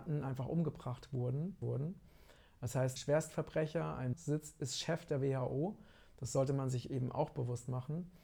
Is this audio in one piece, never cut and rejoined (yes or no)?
no